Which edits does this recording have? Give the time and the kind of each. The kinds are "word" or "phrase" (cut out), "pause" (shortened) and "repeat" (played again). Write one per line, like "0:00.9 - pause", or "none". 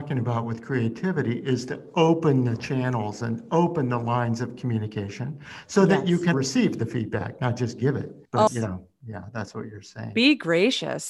0:06.3 - word